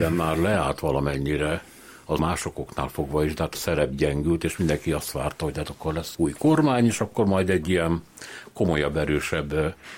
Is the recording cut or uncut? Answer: cut